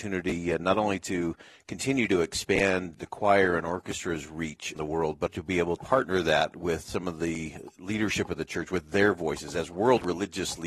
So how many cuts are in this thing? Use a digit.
4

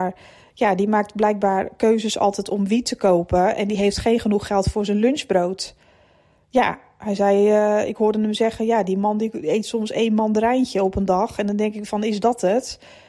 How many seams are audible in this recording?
0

